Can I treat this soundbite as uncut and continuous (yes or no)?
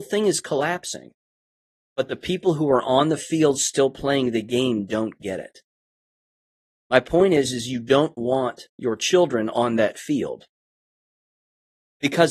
yes